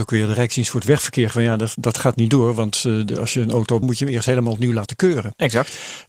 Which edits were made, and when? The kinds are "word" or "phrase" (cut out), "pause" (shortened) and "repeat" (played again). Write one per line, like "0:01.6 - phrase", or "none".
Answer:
0:01.3 - word
0:03.8 - phrase